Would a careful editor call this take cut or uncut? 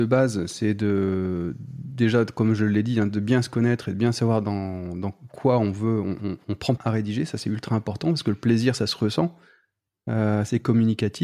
cut